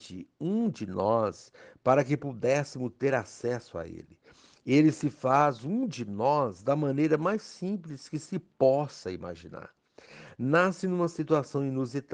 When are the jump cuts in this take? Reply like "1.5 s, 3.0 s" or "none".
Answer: none